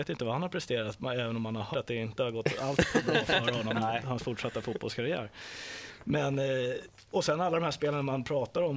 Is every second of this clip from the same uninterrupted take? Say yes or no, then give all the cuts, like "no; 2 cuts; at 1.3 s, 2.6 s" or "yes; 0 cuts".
no; 1 cut; at 1.7 s